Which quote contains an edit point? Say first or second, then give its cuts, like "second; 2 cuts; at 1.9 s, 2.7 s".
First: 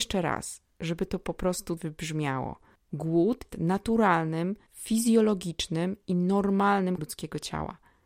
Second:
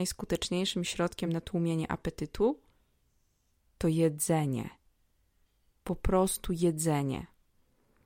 first; 4 cuts; at 1.8 s, 3.5 s, 4.7 s, 7.0 s